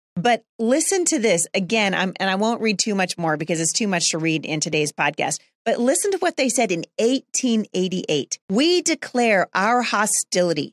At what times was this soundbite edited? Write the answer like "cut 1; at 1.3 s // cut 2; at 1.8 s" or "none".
cut 1; at 8.4 s